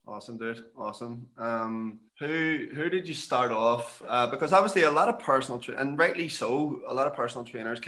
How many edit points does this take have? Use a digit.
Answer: 1